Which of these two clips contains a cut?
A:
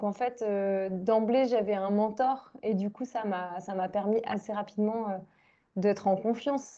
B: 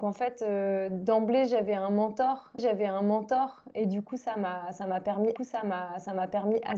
B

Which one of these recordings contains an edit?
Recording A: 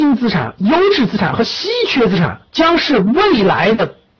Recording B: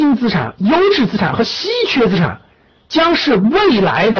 A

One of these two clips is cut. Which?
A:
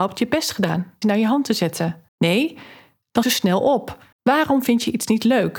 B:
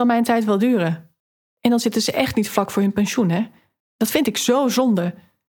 A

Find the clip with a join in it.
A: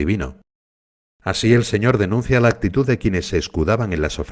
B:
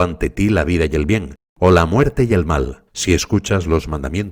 B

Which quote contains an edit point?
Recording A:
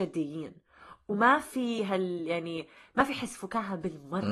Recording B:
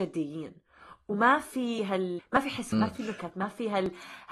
B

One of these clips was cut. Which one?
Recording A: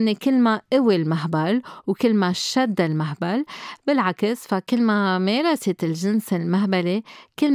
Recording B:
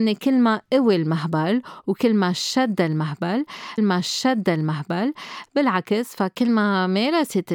B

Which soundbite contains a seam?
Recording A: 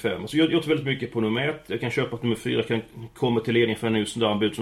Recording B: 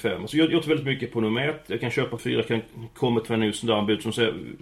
B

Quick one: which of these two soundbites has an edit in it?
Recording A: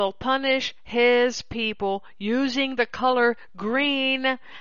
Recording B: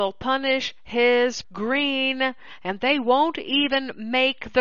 B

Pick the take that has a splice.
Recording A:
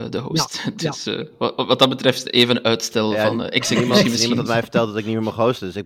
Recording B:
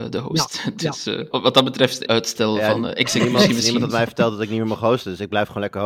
B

